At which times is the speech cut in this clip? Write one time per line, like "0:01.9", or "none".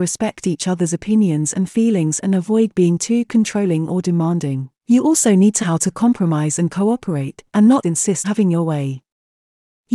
0:04.8
0:05.6
0:07.5
0:07.8
0:08.2